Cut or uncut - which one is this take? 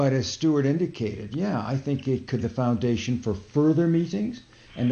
cut